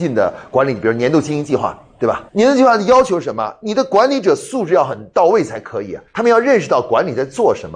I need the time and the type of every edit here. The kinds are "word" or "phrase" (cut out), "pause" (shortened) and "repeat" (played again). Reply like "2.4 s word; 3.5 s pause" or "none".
2.3 s pause; 6.1 s pause